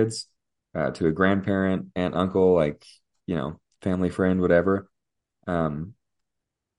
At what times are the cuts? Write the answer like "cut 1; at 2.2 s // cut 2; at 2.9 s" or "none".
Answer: none